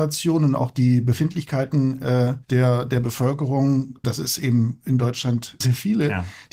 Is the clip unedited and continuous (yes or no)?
no